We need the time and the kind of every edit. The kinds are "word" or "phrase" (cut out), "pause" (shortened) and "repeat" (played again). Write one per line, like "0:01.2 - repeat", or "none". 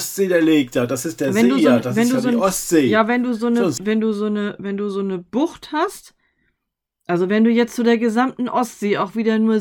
0:03.8 - word